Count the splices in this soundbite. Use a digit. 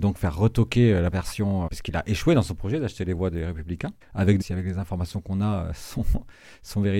4